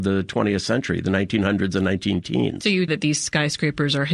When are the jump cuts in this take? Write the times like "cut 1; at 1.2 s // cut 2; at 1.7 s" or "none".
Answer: cut 1; at 2.9 s

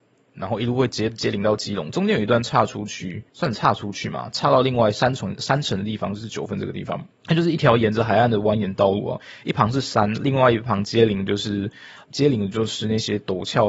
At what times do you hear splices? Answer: cut 1; at 3.3 s // cut 2; at 7.1 s

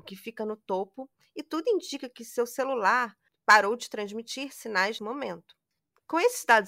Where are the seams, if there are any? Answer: cut 1; at 5.0 s

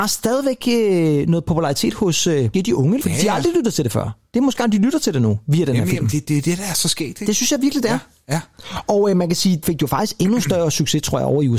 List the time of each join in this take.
cut 1; at 2.5 s // cut 2; at 3.0 s // cut 3; at 4.6 s // cut 4; at 6.2 s // cut 5; at 9.6 s

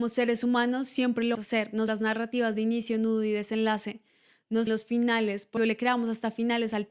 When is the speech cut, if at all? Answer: cut 1; at 1.3 s // cut 2; at 1.9 s // cut 3; at 4.7 s // cut 4; at 5.6 s

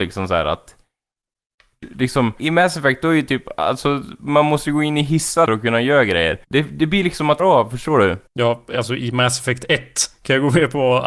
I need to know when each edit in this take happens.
cut 1; at 2.4 s // cut 2; at 5.5 s // cut 3; at 6.4 s // cut 4; at 7.4 s // cut 5; at 8.3 s

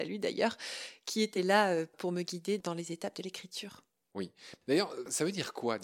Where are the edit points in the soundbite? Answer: none

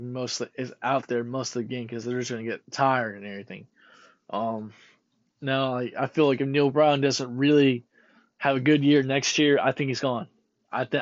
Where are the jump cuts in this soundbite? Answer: none

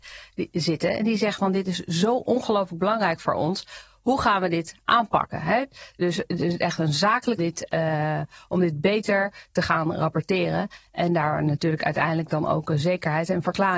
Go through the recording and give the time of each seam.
cut 1; at 7.4 s

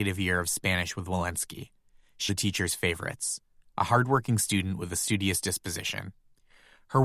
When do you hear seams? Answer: cut 1; at 2.3 s

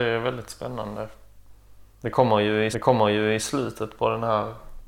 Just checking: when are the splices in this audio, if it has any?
cut 1; at 1.9 s // cut 2; at 2.7 s

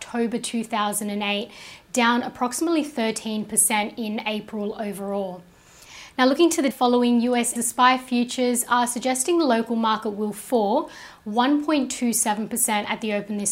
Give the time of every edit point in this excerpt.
cut 1; at 6.7 s // cut 2; at 7.6 s

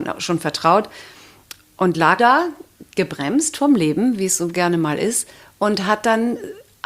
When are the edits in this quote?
cut 1; at 2.2 s

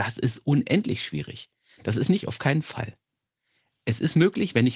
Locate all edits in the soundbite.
cut 1; at 2.2 s

